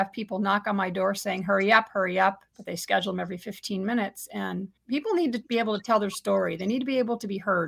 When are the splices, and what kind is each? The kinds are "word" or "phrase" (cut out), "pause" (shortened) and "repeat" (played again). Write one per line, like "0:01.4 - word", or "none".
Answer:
0:02.5 - pause
0:04.8 - pause